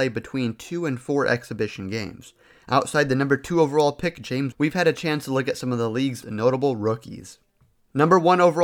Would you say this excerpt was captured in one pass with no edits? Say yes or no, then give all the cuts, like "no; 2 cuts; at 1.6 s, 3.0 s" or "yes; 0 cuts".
no; 2 cuts; at 4.5 s, 6.2 s